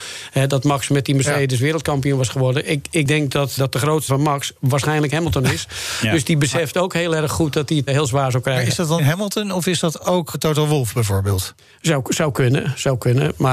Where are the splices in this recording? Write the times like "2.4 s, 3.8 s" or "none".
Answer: 3.6 s, 4.1 s, 7.9 s, 9.0 s, 10.3 s